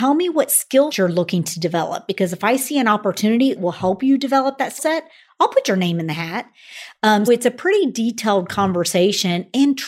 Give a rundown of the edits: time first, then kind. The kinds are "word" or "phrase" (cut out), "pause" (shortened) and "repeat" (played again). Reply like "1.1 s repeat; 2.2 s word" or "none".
0.9 s word; 3.6 s word; 4.8 s word; 7.3 s word